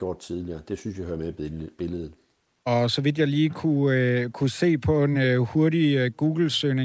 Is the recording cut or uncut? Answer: uncut